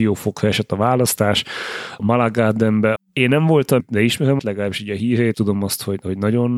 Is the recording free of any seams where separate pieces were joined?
no; 5 cuts; at 2.0 s, 3.0 s, 3.8 s, 4.4 s, 5.3 s

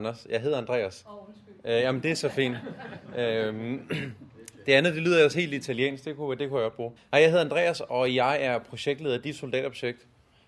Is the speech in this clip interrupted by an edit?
yes; 1 cut; at 7.0 s

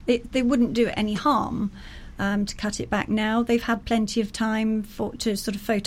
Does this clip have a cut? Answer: no; 0 cuts

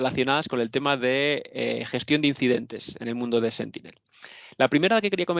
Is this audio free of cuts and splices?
yes; 0 cuts

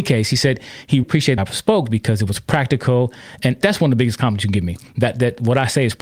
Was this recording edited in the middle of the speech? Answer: yes; 3 cuts; at 1.0 s, 1.4 s, 3.6 s

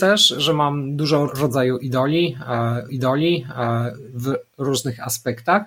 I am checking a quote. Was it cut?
yes; 2 cuts; at 1.3 s, 2.9 s

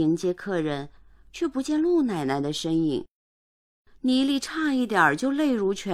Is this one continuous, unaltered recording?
yes; 0 cuts

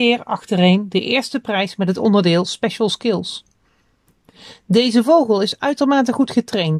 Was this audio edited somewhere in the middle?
no; 0 cuts

